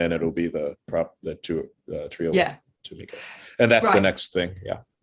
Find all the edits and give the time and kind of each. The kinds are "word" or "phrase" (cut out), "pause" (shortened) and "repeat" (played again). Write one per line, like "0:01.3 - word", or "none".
none